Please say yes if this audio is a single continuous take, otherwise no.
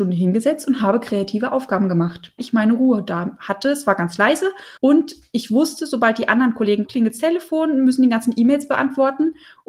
no